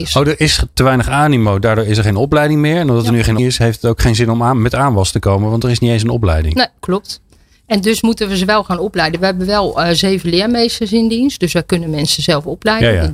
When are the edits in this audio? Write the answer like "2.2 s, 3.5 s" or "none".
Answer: 3.4 s